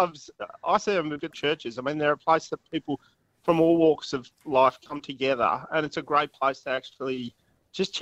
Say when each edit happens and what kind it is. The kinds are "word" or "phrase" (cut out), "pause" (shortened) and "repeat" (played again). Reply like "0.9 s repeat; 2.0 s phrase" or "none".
1.3 s word